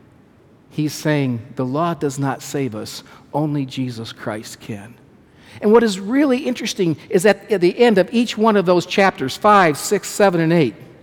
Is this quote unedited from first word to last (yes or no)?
yes